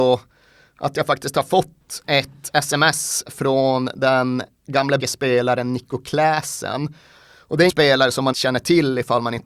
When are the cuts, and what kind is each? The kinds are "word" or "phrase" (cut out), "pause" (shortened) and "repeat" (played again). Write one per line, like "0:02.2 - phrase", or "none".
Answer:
0:05.0 - word
0:07.7 - word
0:08.3 - word